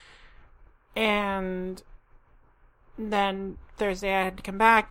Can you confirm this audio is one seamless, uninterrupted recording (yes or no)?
yes